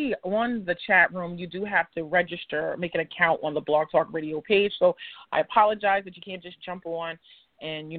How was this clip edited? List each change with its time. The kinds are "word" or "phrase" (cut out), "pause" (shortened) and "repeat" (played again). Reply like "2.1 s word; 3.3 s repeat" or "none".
none